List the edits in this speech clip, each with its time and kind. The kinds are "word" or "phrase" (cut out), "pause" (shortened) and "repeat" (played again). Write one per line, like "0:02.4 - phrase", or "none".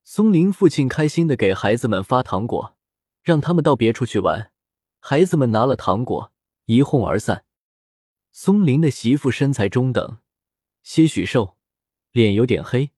none